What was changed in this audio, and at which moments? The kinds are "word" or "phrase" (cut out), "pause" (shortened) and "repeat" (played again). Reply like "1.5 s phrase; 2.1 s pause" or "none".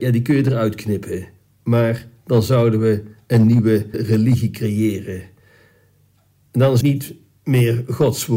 1.4 s pause; 3.9 s phrase; 6.8 s word